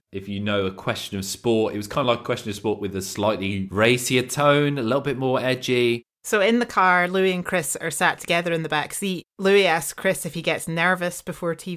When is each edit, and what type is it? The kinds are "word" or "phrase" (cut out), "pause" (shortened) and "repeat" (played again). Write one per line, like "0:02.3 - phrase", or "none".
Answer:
none